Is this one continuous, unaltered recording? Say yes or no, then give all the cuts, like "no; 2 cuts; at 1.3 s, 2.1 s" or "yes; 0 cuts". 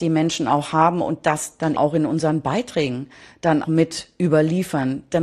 no; 2 cuts; at 1.8 s, 3.6 s